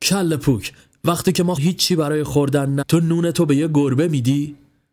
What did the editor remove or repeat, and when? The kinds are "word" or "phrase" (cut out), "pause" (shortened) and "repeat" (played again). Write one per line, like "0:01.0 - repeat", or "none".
0:01.6 - word
0:02.8 - word